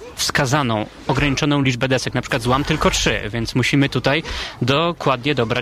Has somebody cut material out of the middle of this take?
no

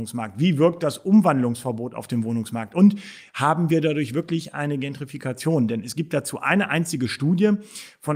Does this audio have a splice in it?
no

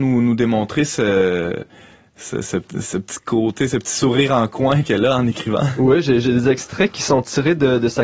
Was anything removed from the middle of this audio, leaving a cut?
no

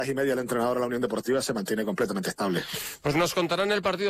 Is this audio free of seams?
yes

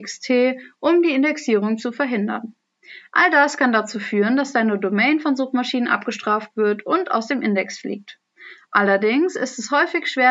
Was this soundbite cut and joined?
no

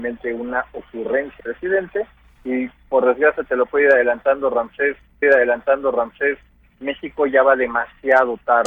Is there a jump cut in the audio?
yes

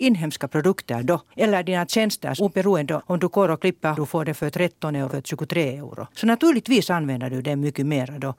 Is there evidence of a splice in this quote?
yes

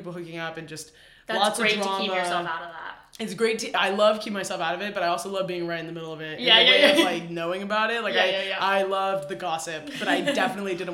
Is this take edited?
no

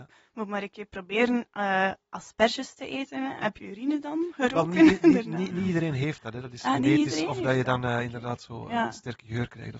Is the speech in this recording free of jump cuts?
no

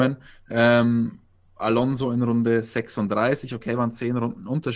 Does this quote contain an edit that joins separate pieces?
no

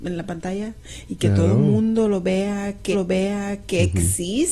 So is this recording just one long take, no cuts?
no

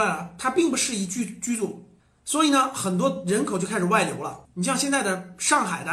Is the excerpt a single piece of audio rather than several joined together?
no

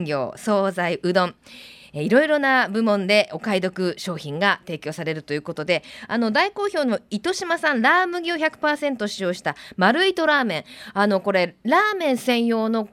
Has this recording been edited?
no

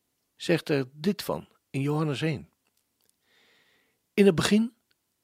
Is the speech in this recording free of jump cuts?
yes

